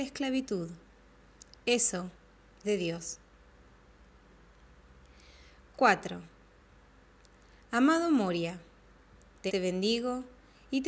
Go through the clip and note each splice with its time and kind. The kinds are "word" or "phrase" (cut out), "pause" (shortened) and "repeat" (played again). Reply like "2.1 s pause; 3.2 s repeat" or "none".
2.6 s word; 9.5 s word